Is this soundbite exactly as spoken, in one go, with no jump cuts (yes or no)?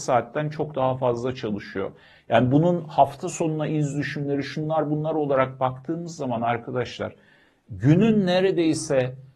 yes